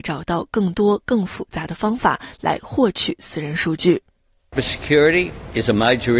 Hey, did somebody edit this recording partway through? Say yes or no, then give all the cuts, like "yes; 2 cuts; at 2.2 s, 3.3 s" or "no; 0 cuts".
yes; 1 cut; at 4.6 s